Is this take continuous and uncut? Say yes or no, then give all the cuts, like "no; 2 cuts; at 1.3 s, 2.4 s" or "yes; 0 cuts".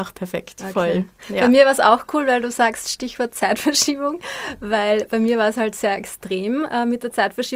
yes; 0 cuts